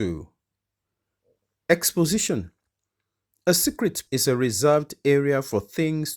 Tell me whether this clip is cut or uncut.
cut